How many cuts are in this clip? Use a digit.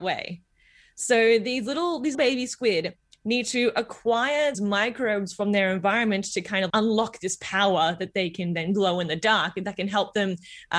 3